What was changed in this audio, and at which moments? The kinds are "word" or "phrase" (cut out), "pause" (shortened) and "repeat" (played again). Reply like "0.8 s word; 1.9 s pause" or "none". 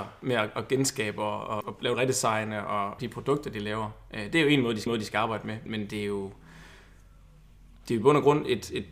1.6 s word; 1.9 s phrase; 3.0 s phrase; 4.9 s repeat; 5.7 s word